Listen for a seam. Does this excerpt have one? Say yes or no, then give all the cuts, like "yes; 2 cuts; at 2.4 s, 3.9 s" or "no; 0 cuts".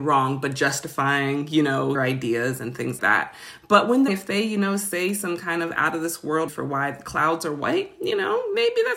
yes; 4 cuts; at 1.9 s, 3.0 s, 4.1 s, 6.5 s